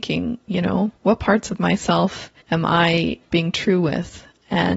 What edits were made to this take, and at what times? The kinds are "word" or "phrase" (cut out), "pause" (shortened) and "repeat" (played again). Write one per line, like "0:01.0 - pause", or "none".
0:01.0 - pause
0:02.4 - pause
0:03.3 - word